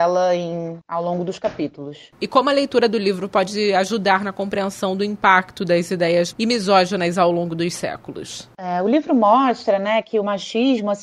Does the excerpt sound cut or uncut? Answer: cut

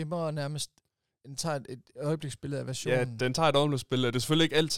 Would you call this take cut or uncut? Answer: uncut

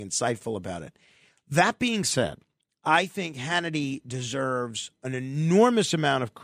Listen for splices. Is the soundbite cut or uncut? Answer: uncut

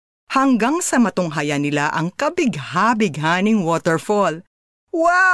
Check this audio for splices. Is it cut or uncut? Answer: uncut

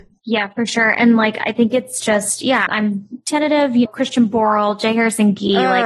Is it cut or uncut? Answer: cut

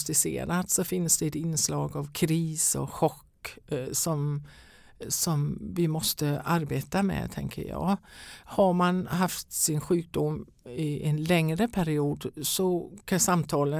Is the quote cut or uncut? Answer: uncut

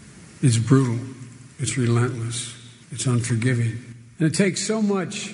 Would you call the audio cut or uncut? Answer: cut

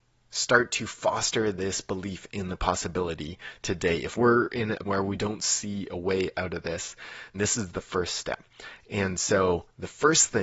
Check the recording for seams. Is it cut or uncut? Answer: cut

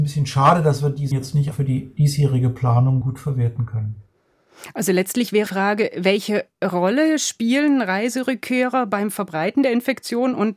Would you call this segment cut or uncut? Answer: cut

